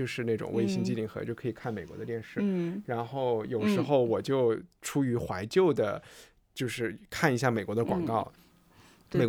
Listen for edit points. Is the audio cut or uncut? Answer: uncut